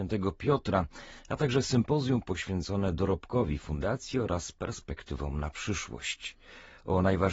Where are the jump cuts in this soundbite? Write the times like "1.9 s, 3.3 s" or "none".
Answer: none